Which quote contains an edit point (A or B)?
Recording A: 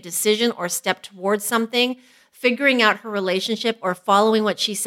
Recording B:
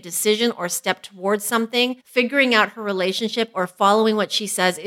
B